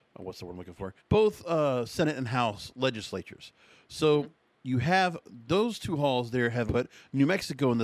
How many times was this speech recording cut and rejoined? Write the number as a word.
three